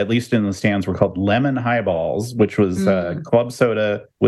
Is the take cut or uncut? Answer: uncut